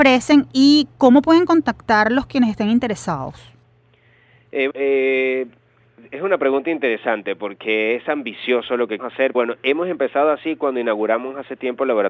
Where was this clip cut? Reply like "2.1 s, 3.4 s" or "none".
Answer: 4.7 s, 9.0 s, 9.3 s